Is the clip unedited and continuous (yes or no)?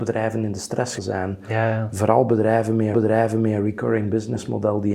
no